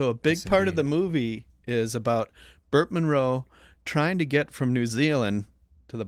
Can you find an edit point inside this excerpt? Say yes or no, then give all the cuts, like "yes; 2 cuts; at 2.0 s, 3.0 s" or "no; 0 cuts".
no; 0 cuts